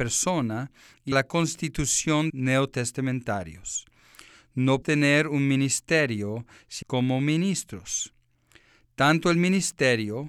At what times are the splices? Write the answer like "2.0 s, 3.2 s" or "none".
1.1 s, 2.3 s, 4.8 s, 6.8 s